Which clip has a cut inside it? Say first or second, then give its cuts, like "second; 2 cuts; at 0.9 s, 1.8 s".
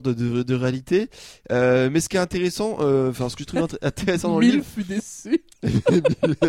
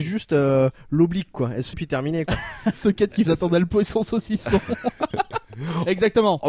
second; 3 cuts; at 1.7 s, 2.8 s, 3.2 s